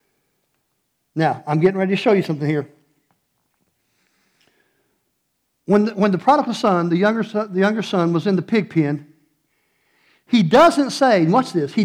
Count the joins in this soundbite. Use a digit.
0